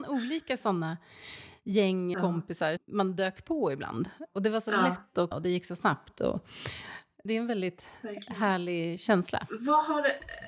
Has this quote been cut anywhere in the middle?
yes; 4 cuts; at 2.1 s, 2.8 s, 5.3 s, 7.3 s

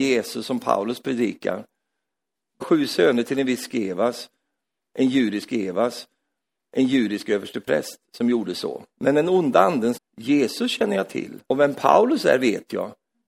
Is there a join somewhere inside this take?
yes; 5 cuts; at 2.6 s, 5.5 s, 8.9 s, 9.9 s, 11.4 s

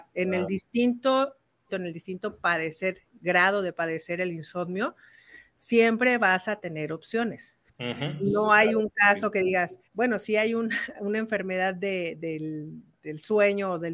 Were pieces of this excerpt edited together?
yes; 3 cuts; at 1.7 s, 7.7 s, 9.9 s

